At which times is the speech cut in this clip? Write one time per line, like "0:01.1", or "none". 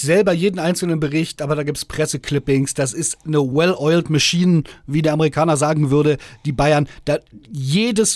none